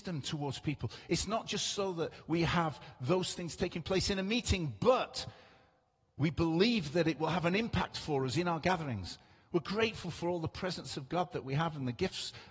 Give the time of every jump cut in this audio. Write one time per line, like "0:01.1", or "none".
none